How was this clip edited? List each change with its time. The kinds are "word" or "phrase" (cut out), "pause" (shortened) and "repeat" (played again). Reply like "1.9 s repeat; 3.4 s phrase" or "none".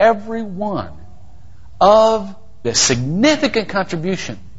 2.6 s phrase